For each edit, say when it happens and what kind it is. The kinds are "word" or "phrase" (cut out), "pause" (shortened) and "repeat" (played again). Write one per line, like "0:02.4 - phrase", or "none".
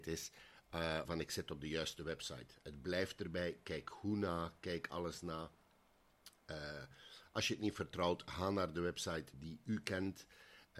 0:01.0 - phrase
0:09.3 - word